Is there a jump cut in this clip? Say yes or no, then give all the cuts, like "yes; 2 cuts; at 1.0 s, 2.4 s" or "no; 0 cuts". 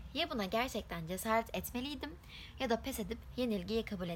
no; 0 cuts